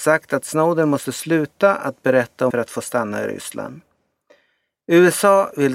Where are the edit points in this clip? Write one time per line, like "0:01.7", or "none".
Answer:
0:02.5